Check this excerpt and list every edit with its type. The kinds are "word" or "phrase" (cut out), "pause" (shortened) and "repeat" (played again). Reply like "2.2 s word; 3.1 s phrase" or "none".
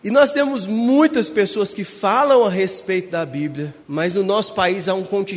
3.8 s pause